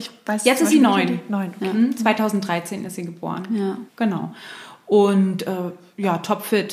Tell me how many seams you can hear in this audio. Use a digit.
1